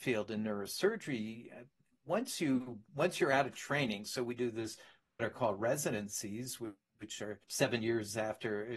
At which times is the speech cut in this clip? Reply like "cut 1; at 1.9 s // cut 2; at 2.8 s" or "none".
cut 1; at 7.4 s